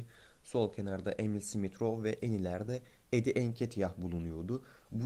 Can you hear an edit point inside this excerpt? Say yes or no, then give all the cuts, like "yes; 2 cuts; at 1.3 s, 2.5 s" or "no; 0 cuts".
no; 0 cuts